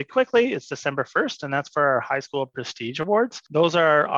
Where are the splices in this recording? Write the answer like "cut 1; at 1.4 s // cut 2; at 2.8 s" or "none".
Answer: none